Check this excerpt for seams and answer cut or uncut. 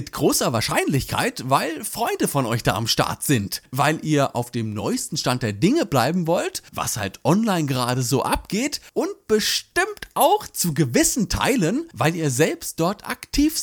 uncut